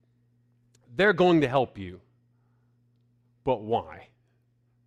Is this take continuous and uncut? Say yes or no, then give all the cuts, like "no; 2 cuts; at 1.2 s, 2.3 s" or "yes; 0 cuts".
yes; 0 cuts